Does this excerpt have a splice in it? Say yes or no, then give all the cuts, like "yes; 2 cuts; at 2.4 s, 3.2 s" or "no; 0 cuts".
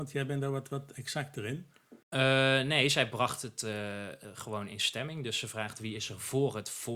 yes; 1 cut; at 2.0 s